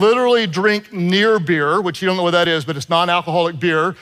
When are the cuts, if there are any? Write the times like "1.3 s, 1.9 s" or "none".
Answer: none